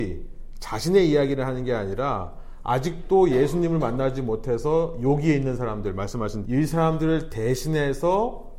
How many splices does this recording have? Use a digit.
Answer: 1